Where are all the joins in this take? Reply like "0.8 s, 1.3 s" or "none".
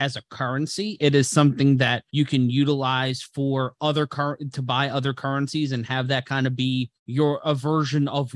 2.1 s, 7.0 s

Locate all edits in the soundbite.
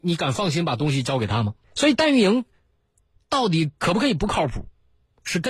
1.6 s

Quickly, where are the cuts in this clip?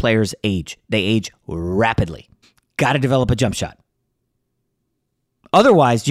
2.4 s

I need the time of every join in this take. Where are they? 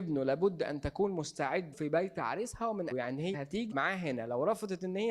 1.7 s, 2.9 s, 3.3 s, 3.7 s

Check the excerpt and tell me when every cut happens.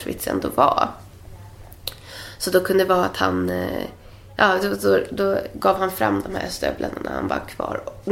none

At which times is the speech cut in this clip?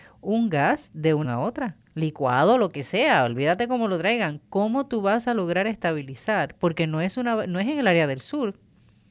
1.2 s, 1.9 s

